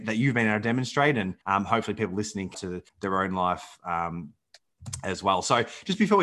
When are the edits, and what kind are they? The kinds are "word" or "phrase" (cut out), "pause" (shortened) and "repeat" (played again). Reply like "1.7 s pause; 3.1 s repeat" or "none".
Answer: 1.4 s pause; 2.5 s word; 2.9 s pause